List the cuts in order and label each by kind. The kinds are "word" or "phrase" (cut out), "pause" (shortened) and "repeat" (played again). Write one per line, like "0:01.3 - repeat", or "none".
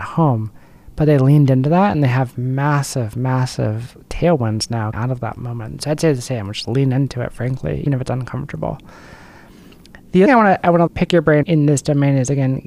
0:04.0 - pause
0:04.9 - word
0:06.6 - word
0:07.9 - word
0:10.3 - phrase
0:10.9 - word
0:11.4 - word